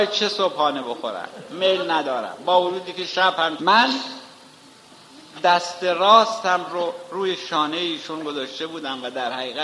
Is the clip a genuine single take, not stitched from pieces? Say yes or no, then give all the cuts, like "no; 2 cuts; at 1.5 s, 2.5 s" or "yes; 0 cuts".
no; 1 cut; at 3.6 s